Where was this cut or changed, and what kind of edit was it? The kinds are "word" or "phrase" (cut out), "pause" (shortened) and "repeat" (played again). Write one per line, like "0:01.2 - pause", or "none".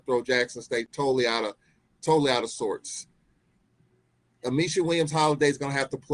none